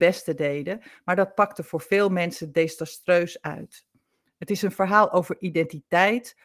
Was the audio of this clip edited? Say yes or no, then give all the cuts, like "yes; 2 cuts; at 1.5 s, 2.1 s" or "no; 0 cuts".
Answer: no; 0 cuts